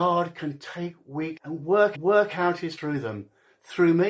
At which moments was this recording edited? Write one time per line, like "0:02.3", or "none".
0:01.4
0:01.9
0:02.8